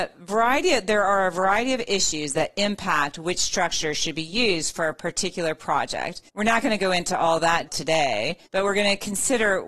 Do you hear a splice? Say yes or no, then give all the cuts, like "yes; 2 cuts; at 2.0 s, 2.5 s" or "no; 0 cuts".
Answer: yes; 3 cuts; at 6.3 s, 7.7 s, 8.5 s